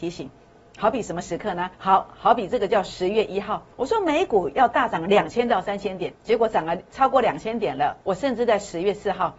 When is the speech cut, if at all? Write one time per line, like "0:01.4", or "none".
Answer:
0:01.7
0:03.7
0:06.2
0:08.0